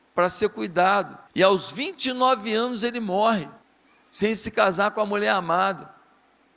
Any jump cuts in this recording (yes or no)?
yes